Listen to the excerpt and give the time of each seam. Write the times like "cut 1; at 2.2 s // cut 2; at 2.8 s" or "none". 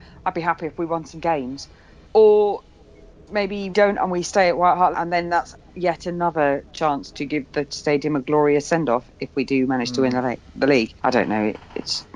cut 1; at 2.0 s // cut 2; at 3.7 s // cut 3; at 4.9 s // cut 4; at 11.0 s

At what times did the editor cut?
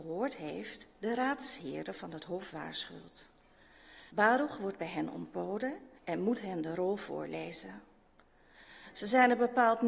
cut 1; at 4.1 s // cut 2; at 6.0 s

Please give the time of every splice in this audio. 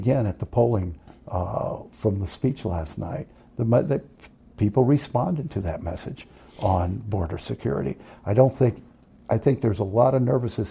none

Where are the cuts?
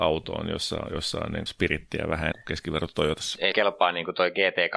cut 1; at 1.5 s // cut 2; at 2.3 s // cut 3; at 3.5 s

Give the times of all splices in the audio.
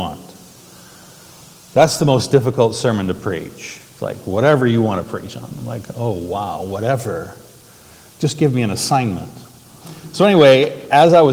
none

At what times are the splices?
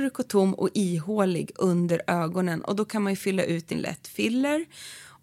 cut 1; at 3.7 s

